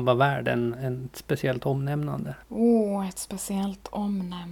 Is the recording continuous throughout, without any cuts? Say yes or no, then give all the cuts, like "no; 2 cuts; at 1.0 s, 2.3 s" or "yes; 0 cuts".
no; 1 cut; at 2.4 s